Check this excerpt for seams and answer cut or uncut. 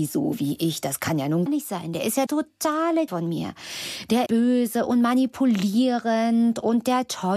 cut